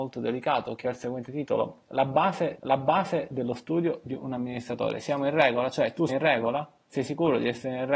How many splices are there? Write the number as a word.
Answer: two